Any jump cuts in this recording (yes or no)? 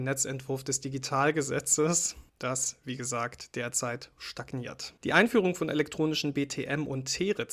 yes